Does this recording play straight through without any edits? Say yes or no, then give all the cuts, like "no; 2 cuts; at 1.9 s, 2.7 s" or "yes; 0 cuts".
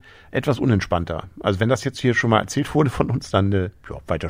yes; 0 cuts